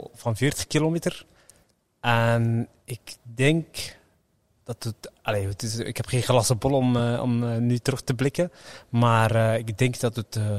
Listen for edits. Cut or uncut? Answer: uncut